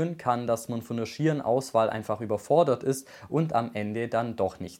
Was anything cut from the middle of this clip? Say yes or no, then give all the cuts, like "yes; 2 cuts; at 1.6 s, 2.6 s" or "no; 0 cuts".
no; 0 cuts